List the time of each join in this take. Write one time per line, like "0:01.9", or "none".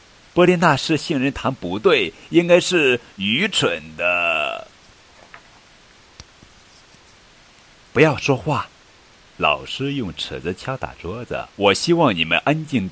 0:11.5